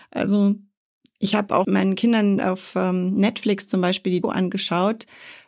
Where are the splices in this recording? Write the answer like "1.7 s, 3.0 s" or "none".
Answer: 1.6 s, 4.2 s